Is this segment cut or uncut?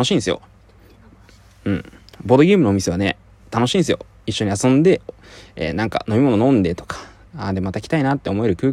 uncut